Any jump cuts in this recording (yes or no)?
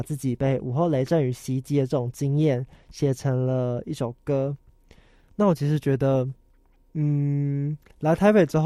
no